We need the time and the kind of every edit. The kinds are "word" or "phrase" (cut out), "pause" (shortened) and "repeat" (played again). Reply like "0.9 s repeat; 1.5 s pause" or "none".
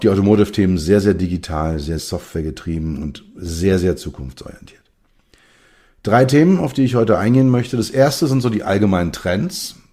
2.0 s word